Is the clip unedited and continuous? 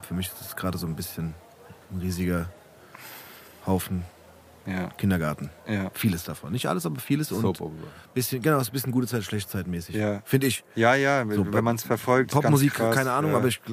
yes; 0 cuts

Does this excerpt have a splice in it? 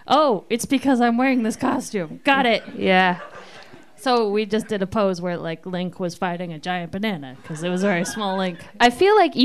no; 0 cuts

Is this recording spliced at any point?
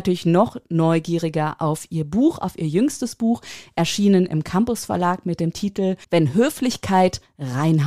yes; 1 cut; at 6.0 s

